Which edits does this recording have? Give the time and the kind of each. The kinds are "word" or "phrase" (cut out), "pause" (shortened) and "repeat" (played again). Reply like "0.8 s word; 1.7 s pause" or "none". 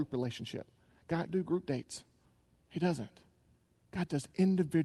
1.3 s phrase; 2.2 s pause